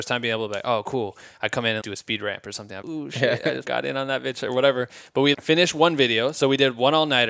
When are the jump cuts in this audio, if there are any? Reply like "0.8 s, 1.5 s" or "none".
1.8 s, 2.8 s, 3.6 s, 5.3 s